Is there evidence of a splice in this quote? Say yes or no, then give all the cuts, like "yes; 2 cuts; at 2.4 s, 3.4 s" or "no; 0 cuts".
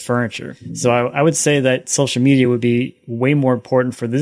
no; 0 cuts